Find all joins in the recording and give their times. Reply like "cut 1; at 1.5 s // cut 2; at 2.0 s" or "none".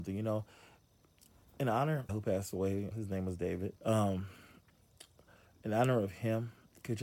cut 1; at 2.1 s // cut 2; at 2.9 s // cut 3; at 3.8 s